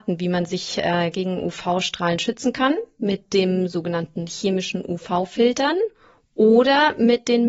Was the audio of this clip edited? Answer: no; 0 cuts

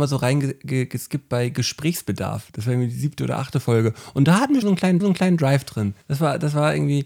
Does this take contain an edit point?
yes; 3 cuts; at 4.6 s, 5.0 s, 6.0 s

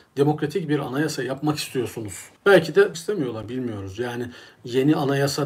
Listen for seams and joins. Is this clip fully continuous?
no; 2 cuts; at 2.4 s, 2.9 s

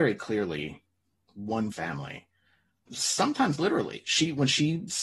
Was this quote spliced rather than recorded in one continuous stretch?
yes; 2 cuts; at 1.7 s, 2.9 s

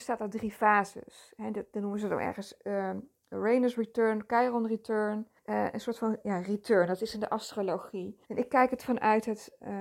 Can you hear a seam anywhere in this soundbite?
yes; 2 cuts; at 5.4 s, 8.2 s

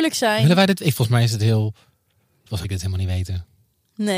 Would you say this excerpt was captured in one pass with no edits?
no; 1 cut; at 2.6 s

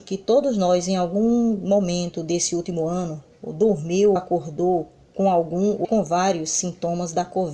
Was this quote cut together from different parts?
yes; 2 cuts; at 4.2 s, 5.8 s

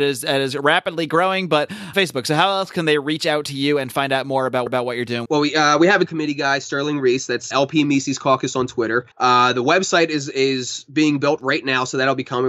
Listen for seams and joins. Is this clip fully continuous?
no; 6 cuts; at 1.9 s, 4.7 s, 5.3 s, 6.1 s, 7.5 s, 9.1 s

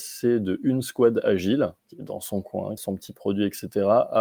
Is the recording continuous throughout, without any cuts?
no; 2 cuts; at 1.8 s, 2.8 s

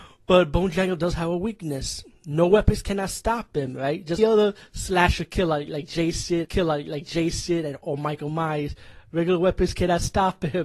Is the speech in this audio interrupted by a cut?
yes; 2 cuts; at 4.2 s, 6.4 s

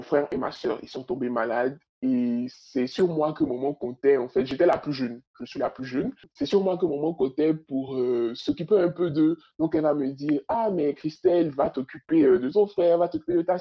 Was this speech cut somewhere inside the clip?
no; 0 cuts

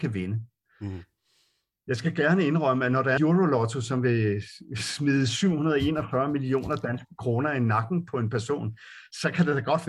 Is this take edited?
yes; 1 cut; at 3.2 s

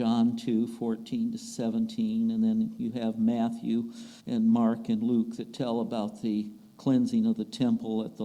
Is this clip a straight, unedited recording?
no; 1 cut; at 4.2 s

